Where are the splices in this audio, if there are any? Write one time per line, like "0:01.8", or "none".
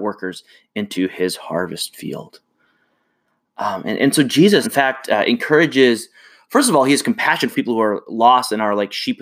0:04.6
0:07.5